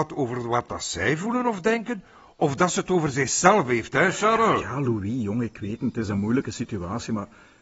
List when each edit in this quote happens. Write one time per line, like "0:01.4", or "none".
none